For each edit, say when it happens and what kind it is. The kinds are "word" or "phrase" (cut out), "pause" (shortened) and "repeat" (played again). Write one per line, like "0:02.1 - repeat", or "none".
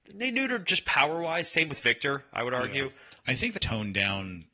0:03.6 - word